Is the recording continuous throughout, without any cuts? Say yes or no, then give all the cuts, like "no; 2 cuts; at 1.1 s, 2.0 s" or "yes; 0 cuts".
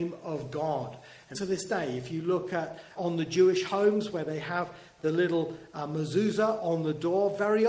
no; 2 cuts; at 1.3 s, 3.0 s